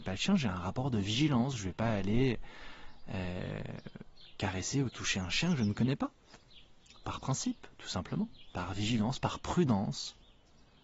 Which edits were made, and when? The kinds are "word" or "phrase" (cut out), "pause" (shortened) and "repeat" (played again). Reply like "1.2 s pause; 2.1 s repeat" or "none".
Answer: none